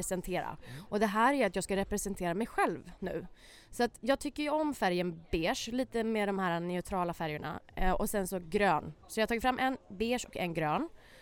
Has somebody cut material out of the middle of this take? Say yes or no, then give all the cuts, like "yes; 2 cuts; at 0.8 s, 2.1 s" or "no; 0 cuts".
no; 0 cuts